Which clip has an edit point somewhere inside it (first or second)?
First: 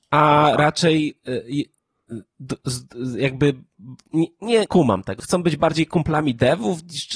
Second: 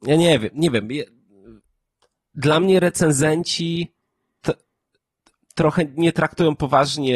first